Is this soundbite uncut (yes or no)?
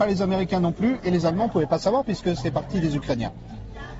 yes